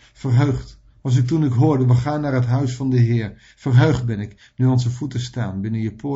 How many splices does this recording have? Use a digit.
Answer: 1